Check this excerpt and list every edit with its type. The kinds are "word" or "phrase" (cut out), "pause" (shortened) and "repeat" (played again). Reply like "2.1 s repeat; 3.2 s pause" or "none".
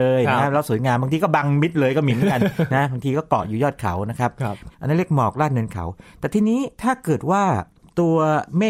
4.7 s pause